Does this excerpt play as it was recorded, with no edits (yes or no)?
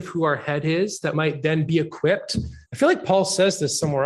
no